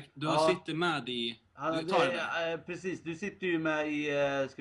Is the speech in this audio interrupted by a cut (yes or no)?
no